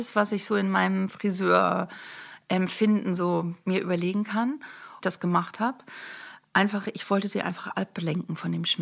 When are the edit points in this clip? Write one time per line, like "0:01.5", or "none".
0:05.0